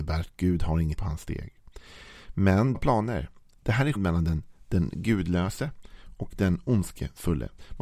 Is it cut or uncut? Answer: cut